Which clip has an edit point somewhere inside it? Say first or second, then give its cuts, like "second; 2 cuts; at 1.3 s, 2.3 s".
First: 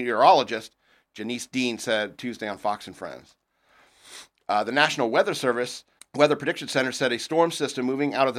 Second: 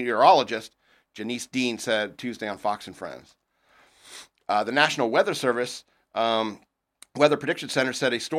first; 1 cut; at 6.0 s